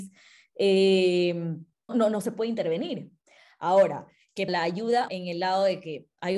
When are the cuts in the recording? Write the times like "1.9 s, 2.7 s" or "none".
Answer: 1.9 s, 4.5 s, 5.1 s